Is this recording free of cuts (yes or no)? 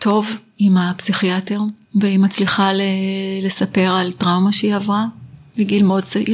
no